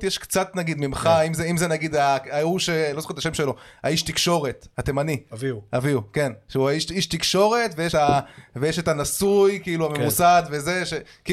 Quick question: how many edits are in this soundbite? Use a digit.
1